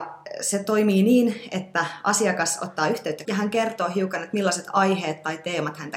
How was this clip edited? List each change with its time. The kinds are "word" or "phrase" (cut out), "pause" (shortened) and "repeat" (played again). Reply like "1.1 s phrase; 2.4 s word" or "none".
3.2 s word